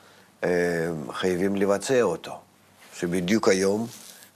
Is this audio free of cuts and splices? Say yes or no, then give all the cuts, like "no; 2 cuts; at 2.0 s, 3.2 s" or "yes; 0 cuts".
yes; 0 cuts